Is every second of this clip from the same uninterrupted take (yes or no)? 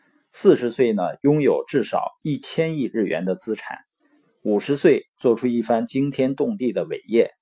yes